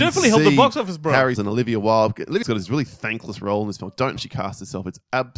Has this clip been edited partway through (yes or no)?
yes